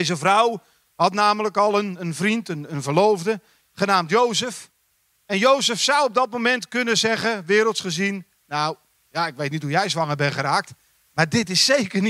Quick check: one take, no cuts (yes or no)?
yes